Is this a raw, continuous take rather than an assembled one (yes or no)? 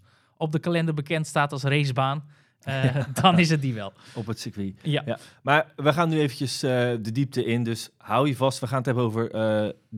yes